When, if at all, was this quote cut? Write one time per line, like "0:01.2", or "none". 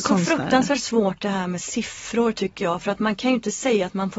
none